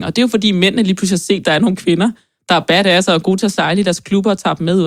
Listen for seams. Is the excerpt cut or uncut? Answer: uncut